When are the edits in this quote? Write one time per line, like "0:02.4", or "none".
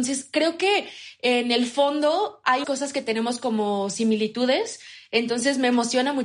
0:02.6